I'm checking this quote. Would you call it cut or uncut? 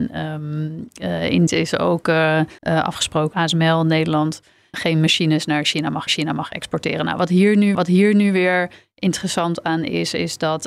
cut